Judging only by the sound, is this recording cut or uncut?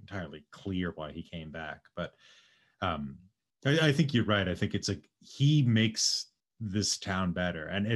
uncut